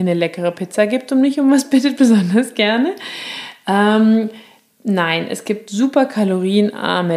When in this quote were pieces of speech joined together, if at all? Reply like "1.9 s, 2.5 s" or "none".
none